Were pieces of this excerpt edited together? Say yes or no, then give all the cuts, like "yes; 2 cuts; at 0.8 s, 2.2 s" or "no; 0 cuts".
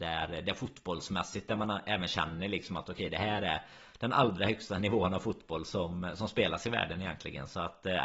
no; 0 cuts